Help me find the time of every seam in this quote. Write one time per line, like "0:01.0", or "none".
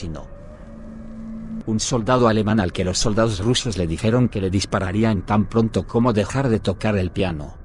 none